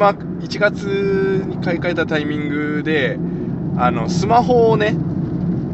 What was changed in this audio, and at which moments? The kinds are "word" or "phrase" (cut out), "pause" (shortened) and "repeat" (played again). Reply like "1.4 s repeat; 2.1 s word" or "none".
none